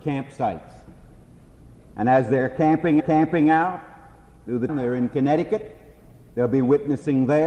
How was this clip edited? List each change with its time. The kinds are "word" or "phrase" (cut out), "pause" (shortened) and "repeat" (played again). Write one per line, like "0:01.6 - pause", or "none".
0:03.0 - repeat
0:04.7 - word